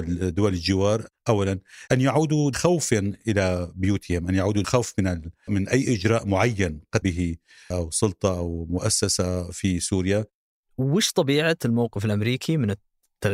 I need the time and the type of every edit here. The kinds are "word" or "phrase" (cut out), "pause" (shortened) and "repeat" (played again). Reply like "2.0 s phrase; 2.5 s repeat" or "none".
1.9 s word; 2.5 s word; 4.6 s word; 5.5 s word; 7.0 s word; 7.7 s word